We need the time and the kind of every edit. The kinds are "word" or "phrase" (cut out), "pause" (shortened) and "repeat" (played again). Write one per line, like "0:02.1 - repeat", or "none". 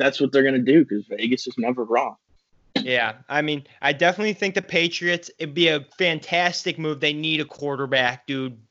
0:05.9 - pause

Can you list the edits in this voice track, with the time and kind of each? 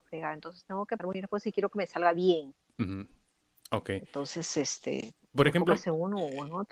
0:01.0 - word

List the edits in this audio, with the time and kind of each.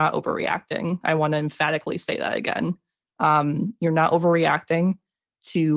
none

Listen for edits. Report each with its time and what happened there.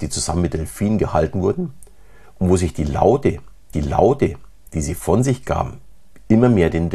0:03.7 - repeat

